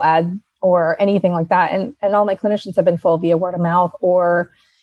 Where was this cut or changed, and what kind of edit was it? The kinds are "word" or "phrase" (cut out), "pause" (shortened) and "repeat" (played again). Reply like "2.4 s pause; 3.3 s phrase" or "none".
none